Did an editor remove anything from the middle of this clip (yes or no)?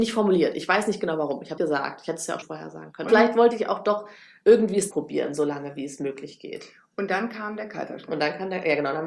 yes